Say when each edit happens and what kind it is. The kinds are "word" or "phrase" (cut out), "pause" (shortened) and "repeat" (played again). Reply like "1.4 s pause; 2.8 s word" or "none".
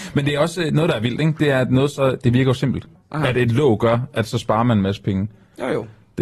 3.0 s pause